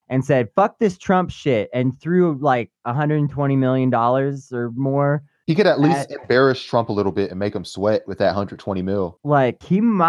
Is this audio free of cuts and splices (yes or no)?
yes